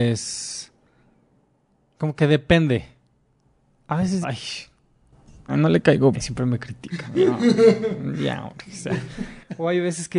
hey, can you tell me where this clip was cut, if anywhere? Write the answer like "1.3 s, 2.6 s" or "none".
4.2 s, 5.5 s, 6.1 s